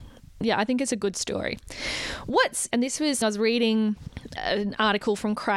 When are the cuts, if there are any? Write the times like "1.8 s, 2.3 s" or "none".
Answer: 2.7 s, 3.2 s, 4.4 s